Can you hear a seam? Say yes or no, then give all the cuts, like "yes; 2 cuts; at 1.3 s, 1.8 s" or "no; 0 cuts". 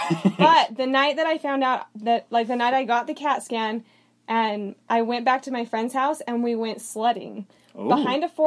no; 0 cuts